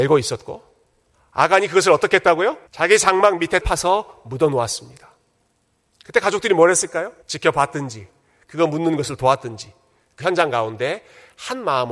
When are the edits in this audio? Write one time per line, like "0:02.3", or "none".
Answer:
0:01.1
0:02.7
0:03.6
0:07.2
0:10.2